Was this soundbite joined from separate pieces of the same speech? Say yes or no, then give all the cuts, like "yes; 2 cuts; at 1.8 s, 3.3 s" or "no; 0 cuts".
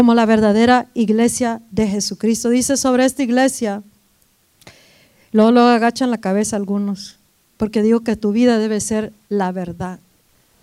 no; 0 cuts